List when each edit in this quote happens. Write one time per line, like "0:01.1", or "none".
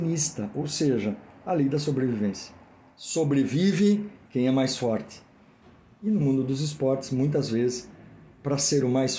none